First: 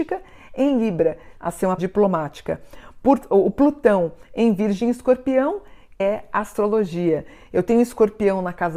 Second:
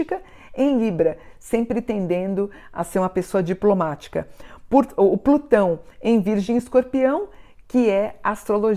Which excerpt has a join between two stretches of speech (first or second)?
first